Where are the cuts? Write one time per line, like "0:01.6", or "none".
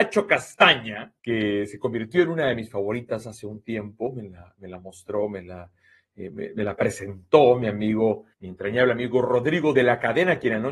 0:01.2
0:08.3

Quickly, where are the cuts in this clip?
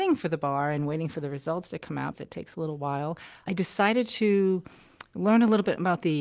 0:02.1
0:03.5

